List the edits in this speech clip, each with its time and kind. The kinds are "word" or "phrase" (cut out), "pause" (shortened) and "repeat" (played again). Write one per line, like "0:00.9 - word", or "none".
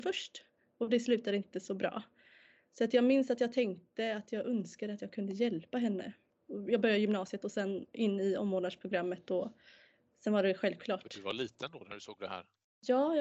none